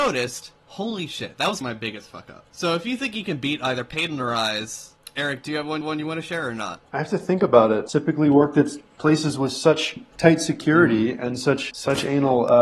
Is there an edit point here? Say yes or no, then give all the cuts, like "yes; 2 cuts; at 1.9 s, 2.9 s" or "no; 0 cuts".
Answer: yes; 3 cuts; at 1.6 s, 5.8 s, 11.7 s